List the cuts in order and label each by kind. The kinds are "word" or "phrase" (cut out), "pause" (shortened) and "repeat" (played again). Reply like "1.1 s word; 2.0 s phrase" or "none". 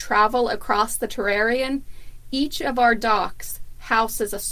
none